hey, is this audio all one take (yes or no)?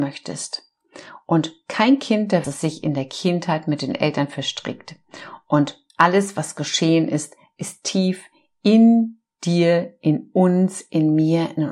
no